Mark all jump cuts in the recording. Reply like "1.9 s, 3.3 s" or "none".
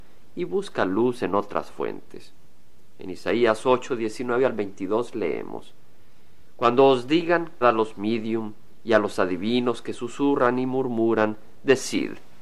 7.6 s